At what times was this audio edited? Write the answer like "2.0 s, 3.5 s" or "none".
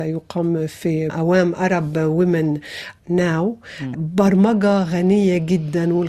1.1 s, 3.0 s, 3.9 s